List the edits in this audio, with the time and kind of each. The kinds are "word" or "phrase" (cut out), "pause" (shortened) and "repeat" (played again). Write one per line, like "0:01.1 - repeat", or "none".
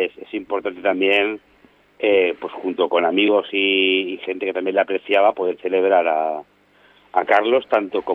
none